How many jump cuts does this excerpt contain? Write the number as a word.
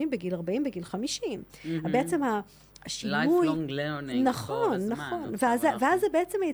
zero